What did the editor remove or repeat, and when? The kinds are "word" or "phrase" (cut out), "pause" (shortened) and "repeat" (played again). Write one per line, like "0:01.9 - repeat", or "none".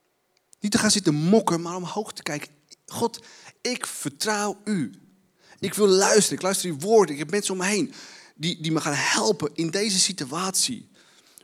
none